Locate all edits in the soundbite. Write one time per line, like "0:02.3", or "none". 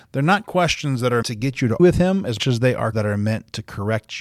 0:01.2
0:01.8
0:02.4
0:02.9